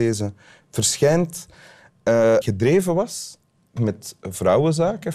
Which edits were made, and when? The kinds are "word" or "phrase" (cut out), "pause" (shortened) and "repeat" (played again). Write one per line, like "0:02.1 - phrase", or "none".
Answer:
0:02.4 - phrase
0:03.8 - word